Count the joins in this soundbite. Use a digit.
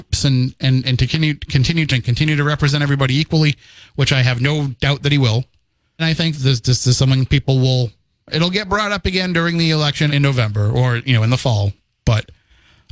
4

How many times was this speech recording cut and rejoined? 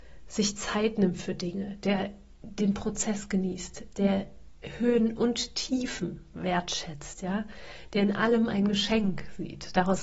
0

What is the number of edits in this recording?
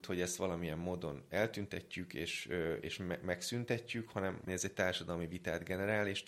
1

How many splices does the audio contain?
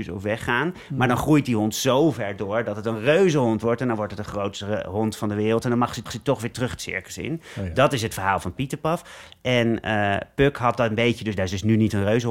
1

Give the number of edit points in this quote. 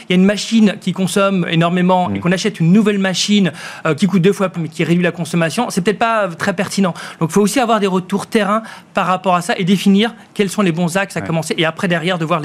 3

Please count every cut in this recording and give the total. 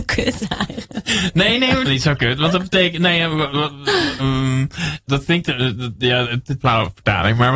4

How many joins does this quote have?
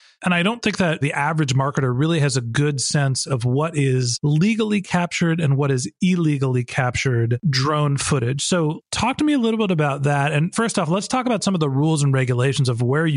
0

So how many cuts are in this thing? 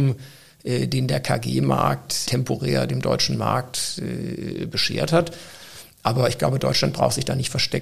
1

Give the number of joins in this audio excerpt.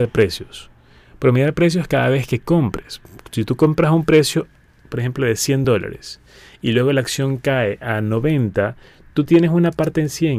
0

